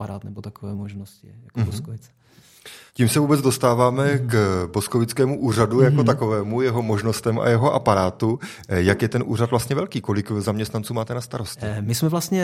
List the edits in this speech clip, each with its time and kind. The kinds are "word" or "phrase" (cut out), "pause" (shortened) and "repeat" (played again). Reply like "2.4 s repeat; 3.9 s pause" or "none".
2.9 s pause